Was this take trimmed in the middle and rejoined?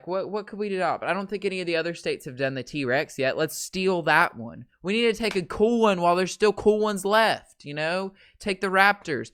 no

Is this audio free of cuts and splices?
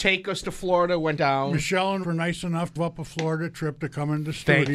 no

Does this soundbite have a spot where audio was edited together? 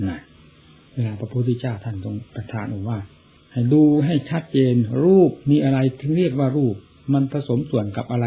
yes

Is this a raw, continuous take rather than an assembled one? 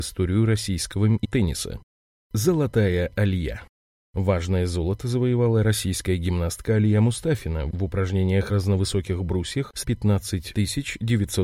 no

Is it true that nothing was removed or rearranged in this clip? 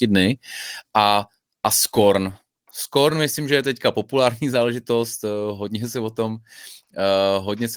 yes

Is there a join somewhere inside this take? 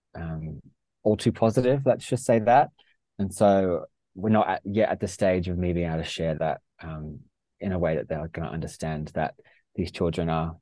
no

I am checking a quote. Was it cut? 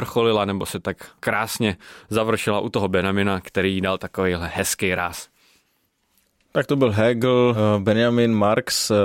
no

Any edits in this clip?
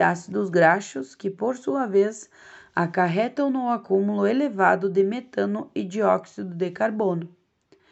no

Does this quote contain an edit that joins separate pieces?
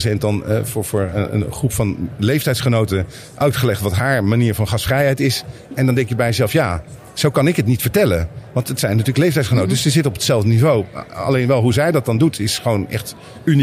no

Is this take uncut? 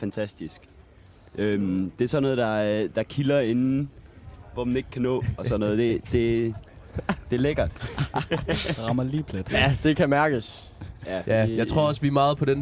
yes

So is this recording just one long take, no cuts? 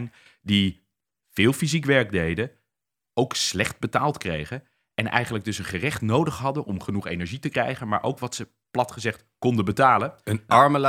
yes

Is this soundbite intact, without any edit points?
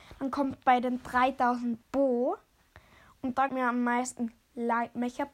no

